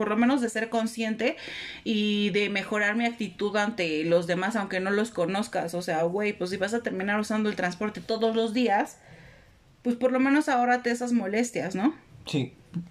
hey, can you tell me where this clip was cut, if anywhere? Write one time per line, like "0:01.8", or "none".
none